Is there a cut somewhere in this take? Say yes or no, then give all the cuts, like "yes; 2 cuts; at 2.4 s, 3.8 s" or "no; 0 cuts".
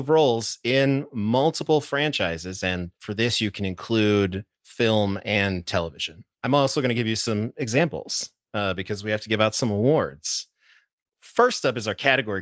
yes; 3 cuts; at 2.9 s, 4.5 s, 6.3 s